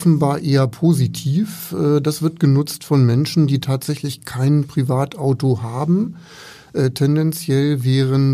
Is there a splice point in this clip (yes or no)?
no